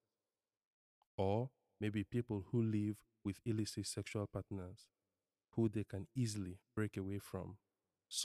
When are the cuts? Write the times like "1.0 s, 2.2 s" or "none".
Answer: none